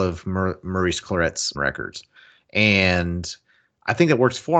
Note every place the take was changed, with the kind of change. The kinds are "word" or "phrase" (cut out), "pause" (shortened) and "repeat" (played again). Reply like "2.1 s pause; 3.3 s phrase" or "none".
1.5 s phrase; 2.2 s pause